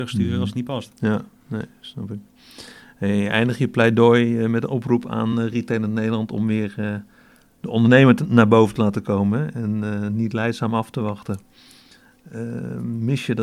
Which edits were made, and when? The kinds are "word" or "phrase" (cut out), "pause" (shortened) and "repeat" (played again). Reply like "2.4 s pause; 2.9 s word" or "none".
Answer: none